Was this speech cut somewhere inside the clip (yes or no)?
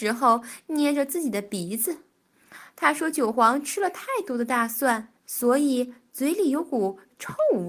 yes